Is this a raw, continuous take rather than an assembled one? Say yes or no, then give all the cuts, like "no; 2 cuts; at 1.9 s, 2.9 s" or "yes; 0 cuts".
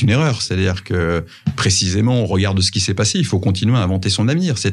yes; 0 cuts